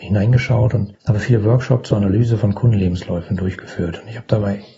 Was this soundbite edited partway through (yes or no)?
no